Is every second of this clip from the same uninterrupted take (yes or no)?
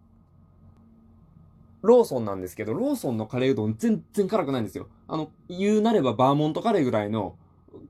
no